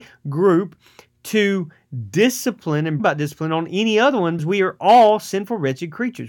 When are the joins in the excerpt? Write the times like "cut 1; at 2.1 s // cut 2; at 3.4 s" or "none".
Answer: cut 1; at 3.0 s // cut 2; at 4.4 s

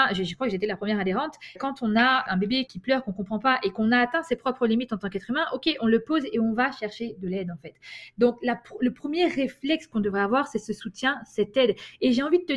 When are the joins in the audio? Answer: cut 1; at 1.6 s // cut 2; at 2.3 s // cut 3; at 2.7 s

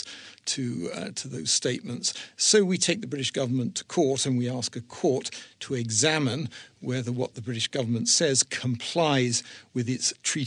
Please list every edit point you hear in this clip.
none

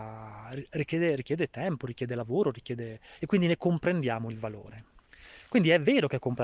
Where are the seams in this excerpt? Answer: cut 1; at 3.2 s

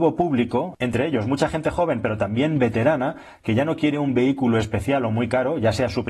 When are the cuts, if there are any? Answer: none

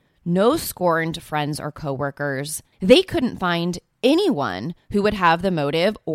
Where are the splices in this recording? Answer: cut 1; at 2.7 s

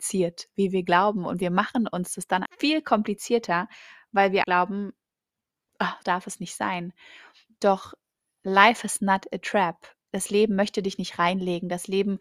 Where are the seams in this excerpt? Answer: cut 1; at 2.5 s // cut 2; at 4.4 s // cut 3; at 6.0 s

